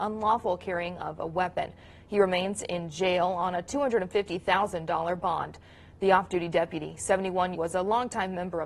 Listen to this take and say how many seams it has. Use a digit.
1